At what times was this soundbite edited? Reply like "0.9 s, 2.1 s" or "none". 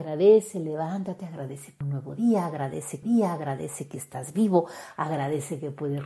1.8 s, 3.0 s